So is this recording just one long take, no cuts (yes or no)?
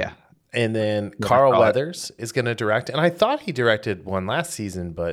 yes